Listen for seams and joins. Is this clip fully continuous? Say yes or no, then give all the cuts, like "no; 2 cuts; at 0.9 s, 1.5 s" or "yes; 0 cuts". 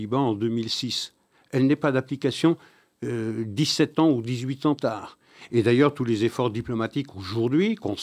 no; 1 cut; at 4.8 s